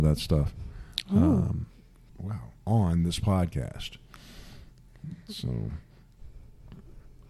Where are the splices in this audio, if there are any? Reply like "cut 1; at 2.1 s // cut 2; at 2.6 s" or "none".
cut 1; at 2.1 s // cut 2; at 2.6 s